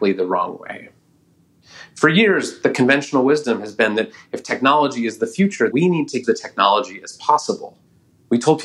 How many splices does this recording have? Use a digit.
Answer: 2